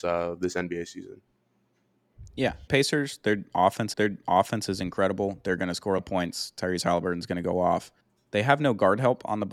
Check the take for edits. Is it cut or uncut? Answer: cut